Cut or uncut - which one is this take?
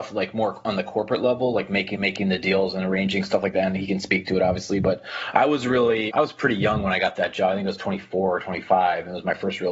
cut